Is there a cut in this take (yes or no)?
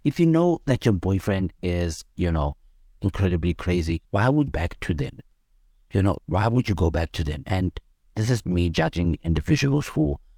yes